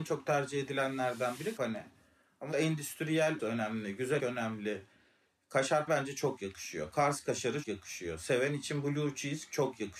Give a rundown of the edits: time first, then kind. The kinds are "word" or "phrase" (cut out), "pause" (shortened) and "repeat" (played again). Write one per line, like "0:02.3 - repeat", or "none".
0:01.6 - word
0:02.5 - word
0:03.4 - word
0:04.2 - word
0:05.9 - word
0:07.6 - word